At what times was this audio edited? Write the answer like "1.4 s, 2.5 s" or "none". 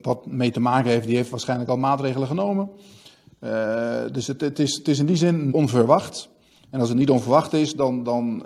5.5 s